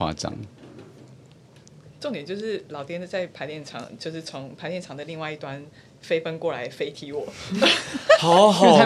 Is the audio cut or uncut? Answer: uncut